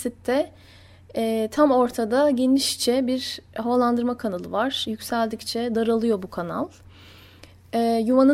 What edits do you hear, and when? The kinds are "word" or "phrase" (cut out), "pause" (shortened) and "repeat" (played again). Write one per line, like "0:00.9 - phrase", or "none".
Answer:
none